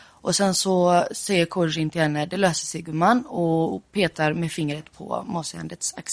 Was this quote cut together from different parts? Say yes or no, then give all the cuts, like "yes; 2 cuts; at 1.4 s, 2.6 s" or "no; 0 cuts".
no; 0 cuts